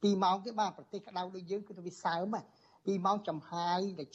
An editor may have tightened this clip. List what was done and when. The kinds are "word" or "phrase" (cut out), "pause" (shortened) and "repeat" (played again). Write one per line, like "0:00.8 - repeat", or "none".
none